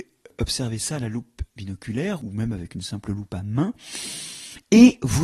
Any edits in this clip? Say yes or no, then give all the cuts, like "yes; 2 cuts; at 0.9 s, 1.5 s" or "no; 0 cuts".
no; 0 cuts